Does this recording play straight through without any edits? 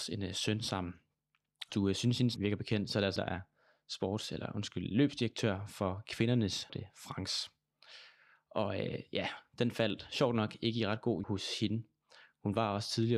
no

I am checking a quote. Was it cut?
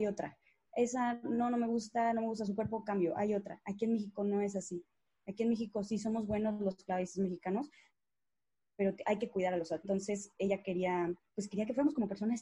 yes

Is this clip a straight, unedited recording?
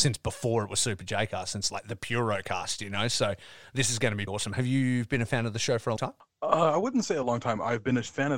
no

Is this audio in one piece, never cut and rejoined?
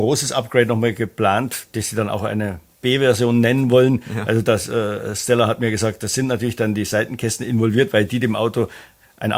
yes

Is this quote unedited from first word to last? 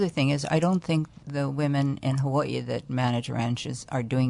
yes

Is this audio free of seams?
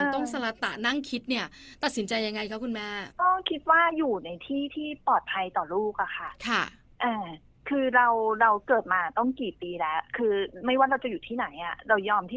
no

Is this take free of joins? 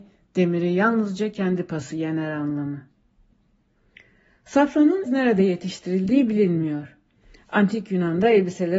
no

